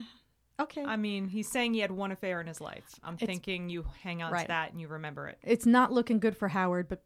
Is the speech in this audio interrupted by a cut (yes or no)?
no